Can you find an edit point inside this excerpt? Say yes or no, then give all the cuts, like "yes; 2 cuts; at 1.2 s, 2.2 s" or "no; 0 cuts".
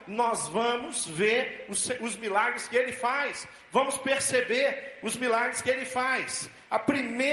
no; 0 cuts